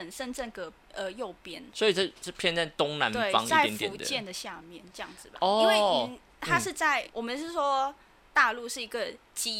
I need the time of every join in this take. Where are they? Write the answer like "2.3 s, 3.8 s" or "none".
1.7 s, 7.1 s